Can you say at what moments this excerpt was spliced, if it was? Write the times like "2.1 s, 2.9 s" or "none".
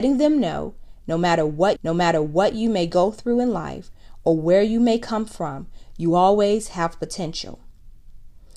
1.7 s